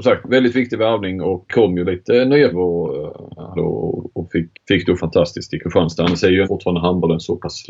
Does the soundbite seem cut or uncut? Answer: cut